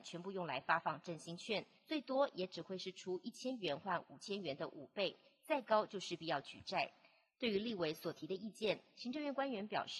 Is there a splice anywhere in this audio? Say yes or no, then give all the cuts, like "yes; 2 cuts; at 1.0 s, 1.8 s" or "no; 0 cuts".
no; 0 cuts